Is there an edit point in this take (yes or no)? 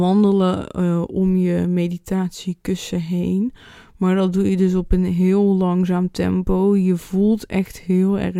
no